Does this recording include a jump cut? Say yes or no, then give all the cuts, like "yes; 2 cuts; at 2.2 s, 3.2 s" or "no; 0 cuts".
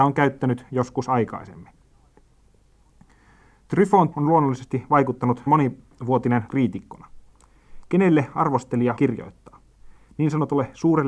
yes; 4 cuts; at 4.1 s, 5.5 s, 6.5 s, 9.0 s